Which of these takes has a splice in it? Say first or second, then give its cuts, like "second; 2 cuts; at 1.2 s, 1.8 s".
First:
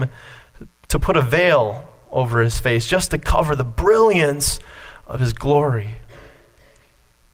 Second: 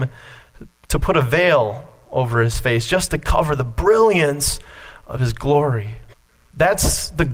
second; 1 cut; at 6.1 s